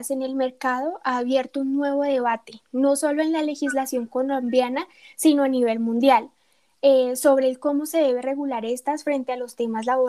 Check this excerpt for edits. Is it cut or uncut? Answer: uncut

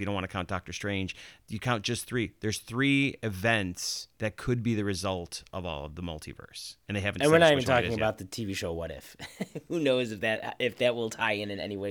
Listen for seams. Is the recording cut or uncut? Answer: cut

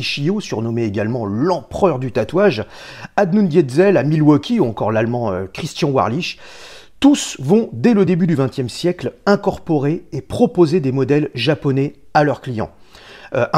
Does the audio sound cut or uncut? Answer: uncut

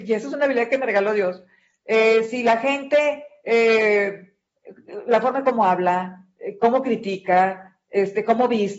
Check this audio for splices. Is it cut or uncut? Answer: uncut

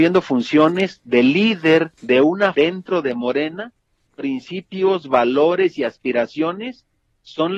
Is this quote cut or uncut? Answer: cut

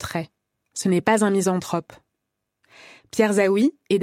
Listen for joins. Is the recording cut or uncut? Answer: uncut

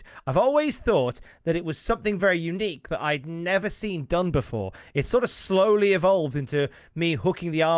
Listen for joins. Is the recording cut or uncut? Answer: uncut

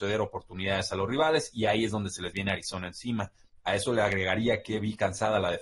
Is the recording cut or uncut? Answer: uncut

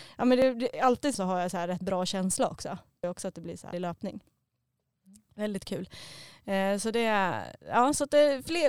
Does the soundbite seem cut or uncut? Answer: cut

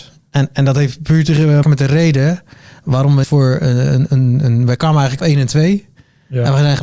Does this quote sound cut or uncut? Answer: cut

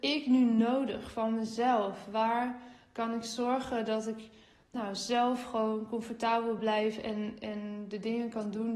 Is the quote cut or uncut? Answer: uncut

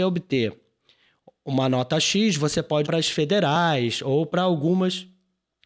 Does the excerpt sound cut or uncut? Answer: cut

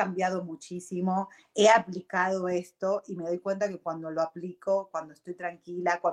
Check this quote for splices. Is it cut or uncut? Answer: uncut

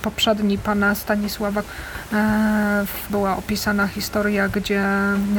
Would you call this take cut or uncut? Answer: cut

